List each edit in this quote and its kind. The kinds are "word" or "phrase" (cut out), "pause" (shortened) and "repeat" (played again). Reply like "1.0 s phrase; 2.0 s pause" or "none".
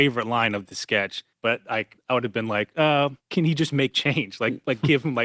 1.3 s pause; 2.0 s pause; 3.2 s pause